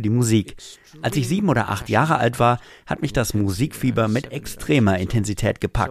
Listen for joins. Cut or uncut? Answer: uncut